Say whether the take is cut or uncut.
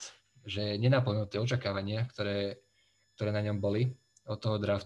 uncut